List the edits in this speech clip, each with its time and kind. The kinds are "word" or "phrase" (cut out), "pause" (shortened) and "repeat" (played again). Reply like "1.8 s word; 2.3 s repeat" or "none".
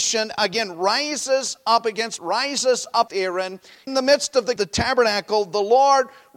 2.2 s word; 3.1 s word; 3.9 s word; 4.6 s word